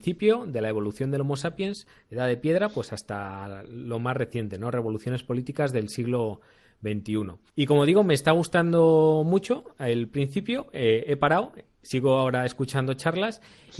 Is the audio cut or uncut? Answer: cut